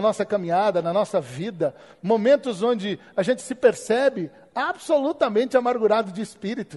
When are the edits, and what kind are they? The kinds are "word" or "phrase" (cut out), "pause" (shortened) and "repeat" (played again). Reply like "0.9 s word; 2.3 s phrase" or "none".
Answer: none